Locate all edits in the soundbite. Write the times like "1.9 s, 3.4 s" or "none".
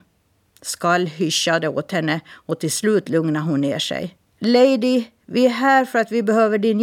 4.3 s